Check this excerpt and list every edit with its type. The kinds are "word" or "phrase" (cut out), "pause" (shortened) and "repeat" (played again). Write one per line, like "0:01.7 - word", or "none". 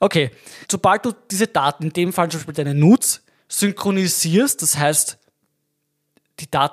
none